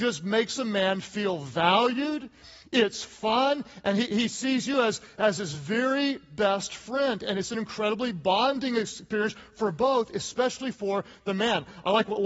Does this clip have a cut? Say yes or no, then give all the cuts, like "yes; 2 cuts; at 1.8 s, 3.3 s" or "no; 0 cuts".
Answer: no; 0 cuts